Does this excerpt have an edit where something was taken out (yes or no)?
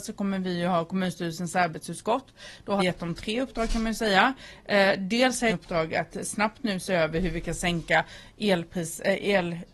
yes